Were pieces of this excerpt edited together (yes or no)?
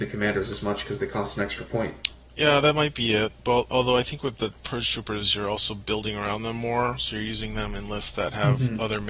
no